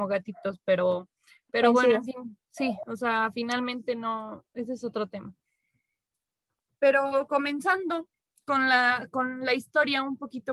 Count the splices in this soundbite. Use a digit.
0